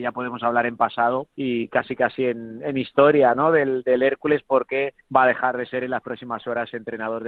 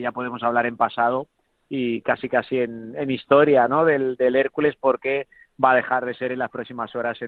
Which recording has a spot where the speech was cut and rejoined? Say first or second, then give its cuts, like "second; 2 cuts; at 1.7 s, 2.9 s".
first; 2 cuts; at 1.3 s, 5.0 s